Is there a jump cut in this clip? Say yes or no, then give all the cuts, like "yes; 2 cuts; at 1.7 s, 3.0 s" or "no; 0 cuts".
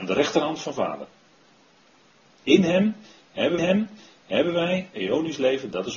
yes; 1 cut; at 3.6 s